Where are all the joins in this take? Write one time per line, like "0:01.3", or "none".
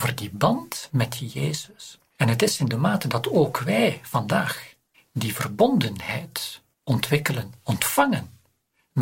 0:04.9
0:06.7